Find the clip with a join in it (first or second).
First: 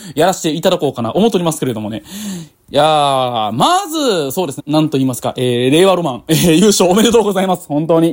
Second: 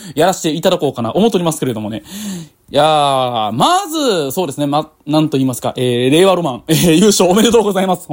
first